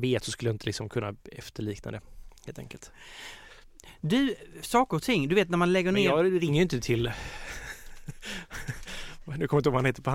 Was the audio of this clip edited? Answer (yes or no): yes